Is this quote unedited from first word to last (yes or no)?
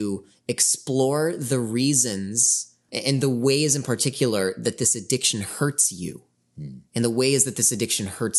no